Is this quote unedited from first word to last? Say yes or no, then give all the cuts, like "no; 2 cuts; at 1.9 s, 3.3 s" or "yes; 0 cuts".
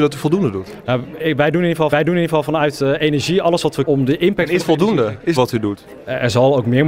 no; 4 cuts; at 1.9 s, 3.9 s, 4.6 s, 5.4 s